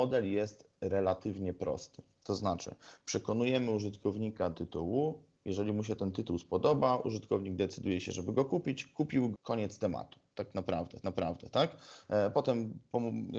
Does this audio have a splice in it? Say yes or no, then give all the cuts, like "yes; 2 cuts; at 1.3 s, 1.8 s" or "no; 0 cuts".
yes; 3 cuts; at 4.5 s, 9.3 s, 11.0 s